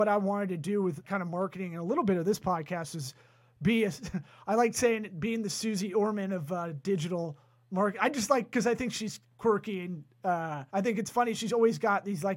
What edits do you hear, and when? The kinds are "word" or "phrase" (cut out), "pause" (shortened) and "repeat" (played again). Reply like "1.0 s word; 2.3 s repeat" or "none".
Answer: 1.0 s word; 10.7 s pause